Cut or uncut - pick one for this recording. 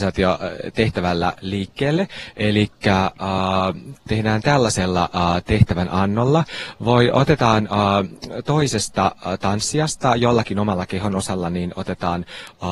uncut